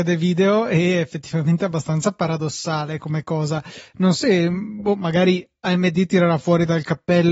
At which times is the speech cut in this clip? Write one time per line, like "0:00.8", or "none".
0:04.2